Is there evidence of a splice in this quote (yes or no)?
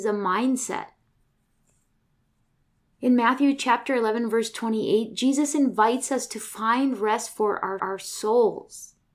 yes